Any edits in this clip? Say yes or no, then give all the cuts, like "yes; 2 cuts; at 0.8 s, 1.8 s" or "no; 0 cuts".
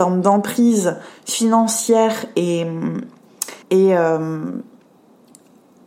yes; 1 cut; at 3.6 s